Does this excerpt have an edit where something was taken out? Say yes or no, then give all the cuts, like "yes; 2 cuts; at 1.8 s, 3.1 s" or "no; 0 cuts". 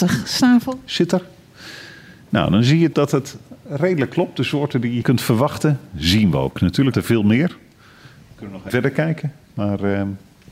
yes; 4 cuts; at 2.9 s, 5.0 s, 6.9 s, 8.7 s